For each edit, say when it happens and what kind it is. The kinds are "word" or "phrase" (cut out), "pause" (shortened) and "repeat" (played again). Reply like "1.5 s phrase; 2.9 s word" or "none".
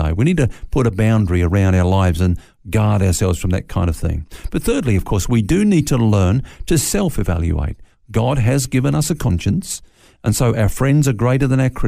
none